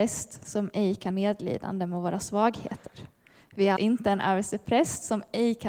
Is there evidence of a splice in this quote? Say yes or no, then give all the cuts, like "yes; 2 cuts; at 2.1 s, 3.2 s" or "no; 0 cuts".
yes; 2 cuts; at 1.1 s, 3.8 s